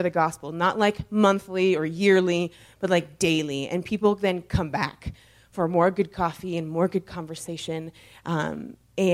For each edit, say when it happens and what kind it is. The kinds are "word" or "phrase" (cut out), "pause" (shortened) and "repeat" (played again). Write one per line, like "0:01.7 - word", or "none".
none